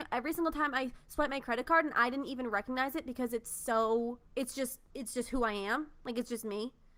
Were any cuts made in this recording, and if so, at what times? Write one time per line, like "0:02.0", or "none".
0:04.3
0:04.9